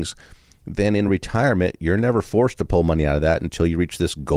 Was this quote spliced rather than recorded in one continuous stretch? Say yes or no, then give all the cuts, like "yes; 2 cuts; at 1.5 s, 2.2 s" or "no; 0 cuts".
no; 0 cuts